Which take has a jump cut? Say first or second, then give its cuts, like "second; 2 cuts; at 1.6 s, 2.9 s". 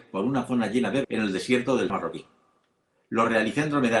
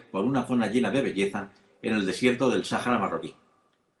first; 2 cuts; at 1.0 s, 1.9 s